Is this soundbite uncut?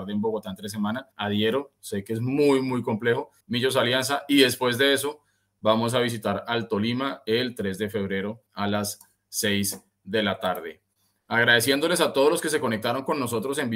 no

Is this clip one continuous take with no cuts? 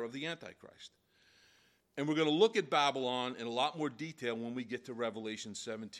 yes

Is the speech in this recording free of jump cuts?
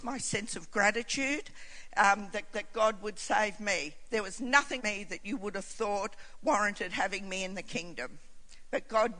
no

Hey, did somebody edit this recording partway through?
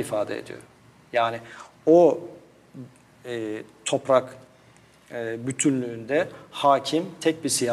yes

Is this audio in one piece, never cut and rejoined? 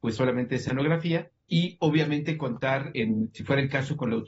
no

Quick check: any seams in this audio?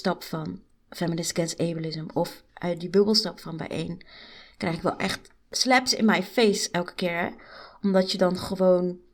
no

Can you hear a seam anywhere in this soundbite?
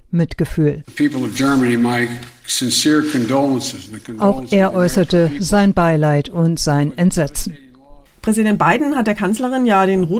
no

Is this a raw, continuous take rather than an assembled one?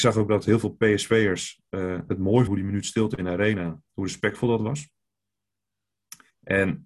no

